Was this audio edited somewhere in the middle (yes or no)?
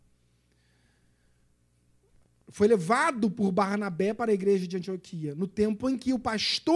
no